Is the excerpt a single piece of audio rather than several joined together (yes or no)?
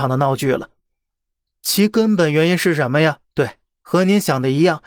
no